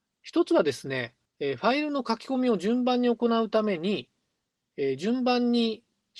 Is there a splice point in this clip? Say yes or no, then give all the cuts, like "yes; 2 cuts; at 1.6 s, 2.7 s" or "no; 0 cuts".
yes; 1 cut; at 1.3 s